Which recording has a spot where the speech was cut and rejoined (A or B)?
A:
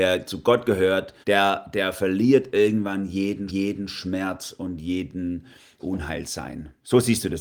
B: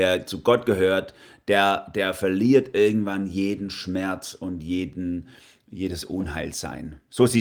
A